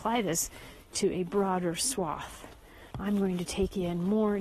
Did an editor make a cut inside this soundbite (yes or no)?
yes